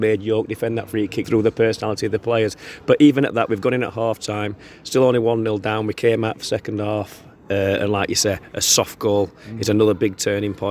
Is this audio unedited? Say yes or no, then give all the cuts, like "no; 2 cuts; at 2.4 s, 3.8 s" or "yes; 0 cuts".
no; 1 cut; at 1.2 s